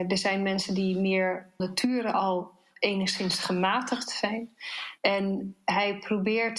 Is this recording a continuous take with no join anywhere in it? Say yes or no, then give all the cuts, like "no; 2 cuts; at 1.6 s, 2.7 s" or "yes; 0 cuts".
no; 2 cuts; at 1.6 s, 5.0 s